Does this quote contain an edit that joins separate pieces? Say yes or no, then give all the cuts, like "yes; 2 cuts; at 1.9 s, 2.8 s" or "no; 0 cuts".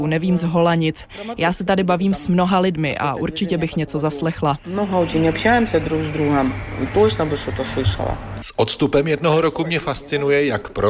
no; 0 cuts